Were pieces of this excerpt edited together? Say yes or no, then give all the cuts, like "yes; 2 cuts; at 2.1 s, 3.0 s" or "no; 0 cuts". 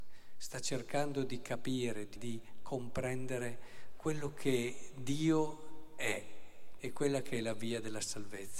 yes; 2 cuts; at 2.2 s, 6.8 s